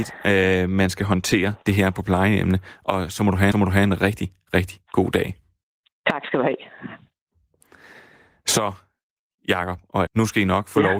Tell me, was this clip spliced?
yes; 3 cuts; at 1.6 s, 3.5 s, 10.1 s

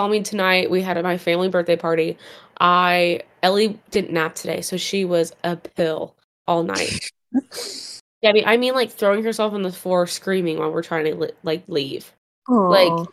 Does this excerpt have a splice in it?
no; 0 cuts

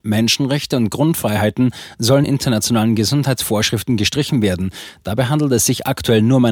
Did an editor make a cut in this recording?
yes; 1 cut; at 2.2 s

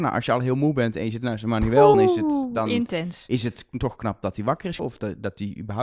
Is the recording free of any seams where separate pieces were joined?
no; 2 cuts; at 1.9 s, 4.8 s

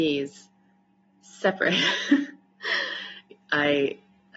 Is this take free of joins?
yes; 0 cuts

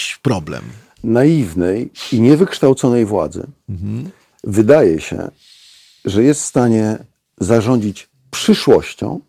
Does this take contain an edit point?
no; 0 cuts

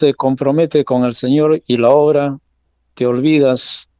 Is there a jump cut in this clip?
no; 0 cuts

